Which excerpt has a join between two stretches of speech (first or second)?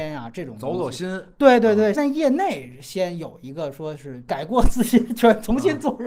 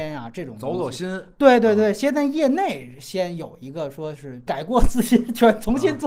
first